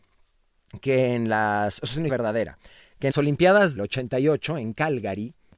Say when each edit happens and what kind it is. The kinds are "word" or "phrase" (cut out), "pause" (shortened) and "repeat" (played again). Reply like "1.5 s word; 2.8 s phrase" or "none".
2.1 s word; 3.1 s word; 3.8 s word